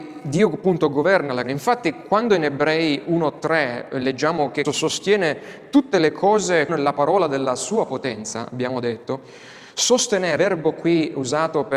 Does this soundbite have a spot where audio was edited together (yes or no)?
yes